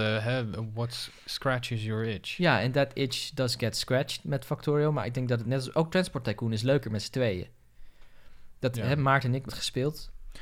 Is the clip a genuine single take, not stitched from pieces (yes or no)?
no